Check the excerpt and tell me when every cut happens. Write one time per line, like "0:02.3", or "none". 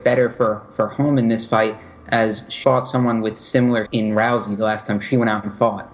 0:02.6
0:03.9